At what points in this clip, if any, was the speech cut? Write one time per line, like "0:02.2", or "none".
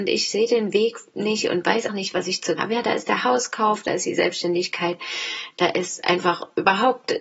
0:01.9
0:02.6